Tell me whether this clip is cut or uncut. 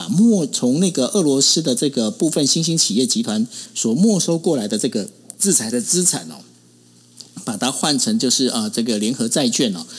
uncut